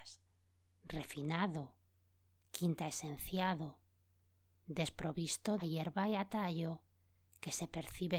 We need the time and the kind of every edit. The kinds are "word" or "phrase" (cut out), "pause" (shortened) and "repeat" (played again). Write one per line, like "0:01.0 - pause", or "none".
0:05.6 - phrase